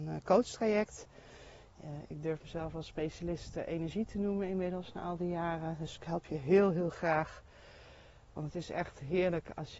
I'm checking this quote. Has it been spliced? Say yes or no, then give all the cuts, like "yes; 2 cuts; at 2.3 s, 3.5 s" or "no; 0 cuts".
no; 0 cuts